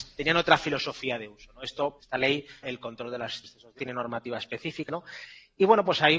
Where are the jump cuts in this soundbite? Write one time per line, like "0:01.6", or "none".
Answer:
0:02.0
0:02.6
0:03.4
0:03.8
0:04.9